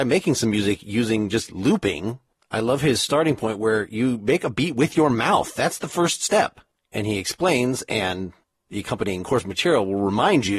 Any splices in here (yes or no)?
no